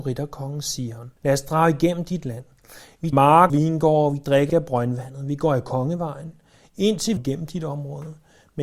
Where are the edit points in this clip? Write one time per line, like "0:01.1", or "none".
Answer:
0:01.2
0:03.1
0:03.5
0:04.5
0:07.2